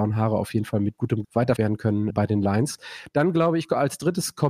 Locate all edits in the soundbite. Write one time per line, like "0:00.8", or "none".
0:01.2
0:01.6
0:02.1